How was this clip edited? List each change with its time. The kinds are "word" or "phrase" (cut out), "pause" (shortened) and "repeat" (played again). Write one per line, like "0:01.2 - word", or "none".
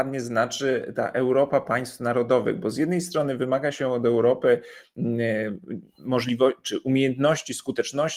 none